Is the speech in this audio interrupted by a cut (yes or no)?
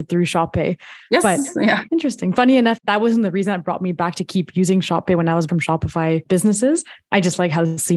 yes